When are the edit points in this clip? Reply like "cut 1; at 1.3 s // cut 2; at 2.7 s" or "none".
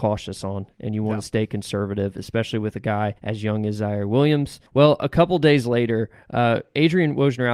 cut 1; at 3.2 s // cut 2; at 4.7 s